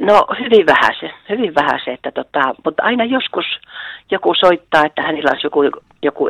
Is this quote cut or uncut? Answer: uncut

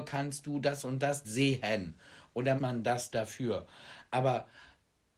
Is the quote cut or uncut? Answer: cut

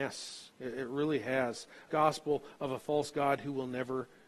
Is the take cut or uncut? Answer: cut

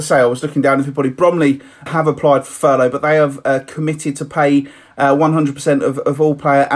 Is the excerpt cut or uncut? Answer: cut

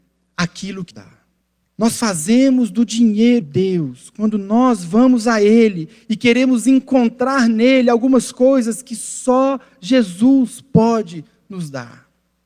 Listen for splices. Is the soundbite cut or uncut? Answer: cut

